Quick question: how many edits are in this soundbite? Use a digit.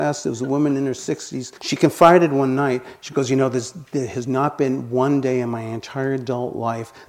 1